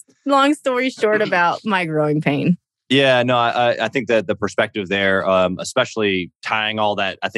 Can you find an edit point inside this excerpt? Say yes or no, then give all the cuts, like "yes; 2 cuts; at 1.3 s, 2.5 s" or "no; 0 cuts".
no; 0 cuts